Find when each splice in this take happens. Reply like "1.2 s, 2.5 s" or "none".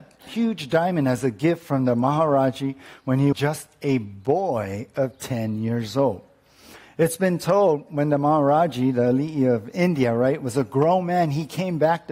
3.3 s